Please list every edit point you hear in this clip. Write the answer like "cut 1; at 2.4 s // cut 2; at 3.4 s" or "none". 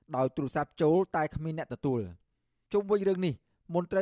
none